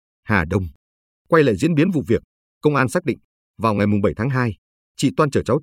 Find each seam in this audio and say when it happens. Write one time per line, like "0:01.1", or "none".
none